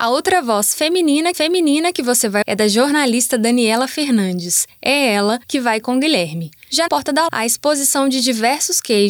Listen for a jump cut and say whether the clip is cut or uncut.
cut